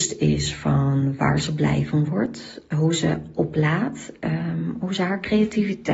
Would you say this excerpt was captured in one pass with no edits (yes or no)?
yes